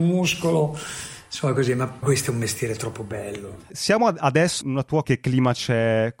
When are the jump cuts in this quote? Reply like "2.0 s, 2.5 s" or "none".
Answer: 2.0 s, 3.7 s, 4.6 s, 5.0 s